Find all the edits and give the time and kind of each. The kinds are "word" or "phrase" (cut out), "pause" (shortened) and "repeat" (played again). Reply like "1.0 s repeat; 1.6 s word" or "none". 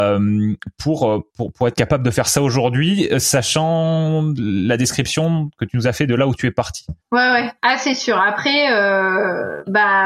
1.3 s pause; 7.0 s pause; 7.6 s pause